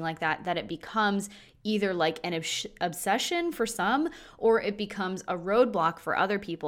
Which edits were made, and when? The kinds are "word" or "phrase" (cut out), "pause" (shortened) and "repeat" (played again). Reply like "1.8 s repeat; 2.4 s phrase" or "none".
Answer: none

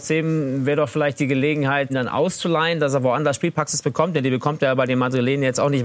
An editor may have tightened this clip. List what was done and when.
1.9 s word

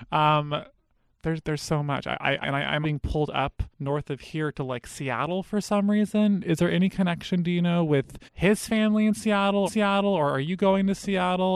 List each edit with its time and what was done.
2.4 s phrase; 2.8 s word; 3.7 s pause; 8.3 s pause; 9.7 s repeat

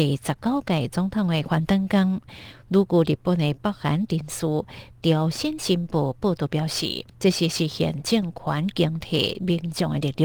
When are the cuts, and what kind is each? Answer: 7.1 s pause

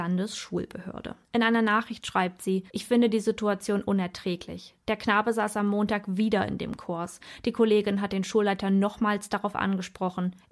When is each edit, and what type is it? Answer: 1.2 s pause; 2.7 s pause

